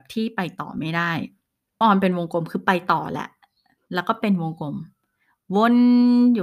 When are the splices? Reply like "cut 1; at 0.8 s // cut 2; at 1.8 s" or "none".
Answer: cut 1; at 1.8 s